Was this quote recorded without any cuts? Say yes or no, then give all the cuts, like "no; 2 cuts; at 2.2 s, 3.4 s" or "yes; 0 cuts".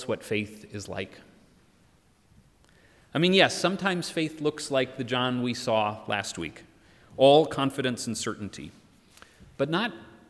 yes; 0 cuts